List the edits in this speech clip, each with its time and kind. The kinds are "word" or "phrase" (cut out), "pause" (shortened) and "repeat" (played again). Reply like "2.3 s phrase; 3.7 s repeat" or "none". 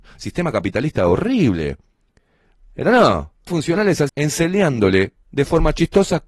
3.5 s word; 4.1 s phrase